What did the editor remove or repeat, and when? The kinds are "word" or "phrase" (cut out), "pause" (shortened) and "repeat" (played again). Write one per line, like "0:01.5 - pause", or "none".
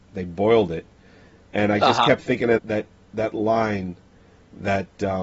0:02.6 - word